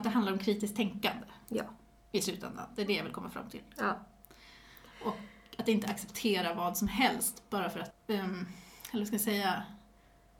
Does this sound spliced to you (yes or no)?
no